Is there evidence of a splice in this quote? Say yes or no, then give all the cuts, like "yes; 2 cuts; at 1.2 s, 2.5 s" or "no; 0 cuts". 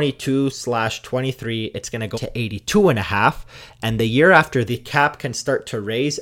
yes; 2 cuts; at 2.1 s, 4.7 s